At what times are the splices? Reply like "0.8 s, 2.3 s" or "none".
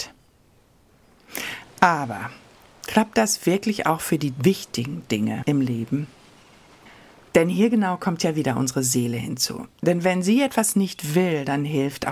none